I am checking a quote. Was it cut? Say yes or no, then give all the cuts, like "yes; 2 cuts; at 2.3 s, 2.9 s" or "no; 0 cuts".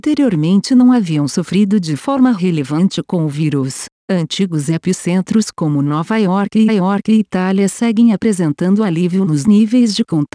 yes; 1 cut; at 6.7 s